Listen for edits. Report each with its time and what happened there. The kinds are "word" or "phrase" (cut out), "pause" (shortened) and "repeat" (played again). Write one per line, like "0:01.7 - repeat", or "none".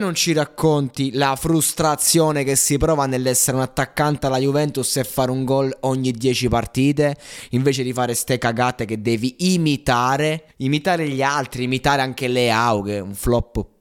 0:10.5 - pause